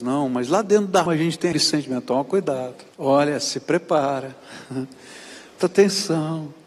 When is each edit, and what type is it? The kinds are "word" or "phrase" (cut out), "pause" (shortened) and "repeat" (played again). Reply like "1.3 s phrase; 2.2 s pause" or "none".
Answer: 1.1 s word; 1.5 s word; 2.9 s pause; 5.6 s word